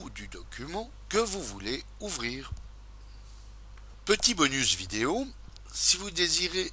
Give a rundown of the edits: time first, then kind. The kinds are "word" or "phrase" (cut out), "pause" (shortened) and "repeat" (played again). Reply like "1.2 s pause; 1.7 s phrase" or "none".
none